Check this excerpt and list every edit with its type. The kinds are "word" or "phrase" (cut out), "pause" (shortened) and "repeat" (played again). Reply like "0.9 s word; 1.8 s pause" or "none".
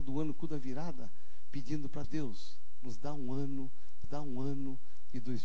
2.0 s word; 4.0 s repeat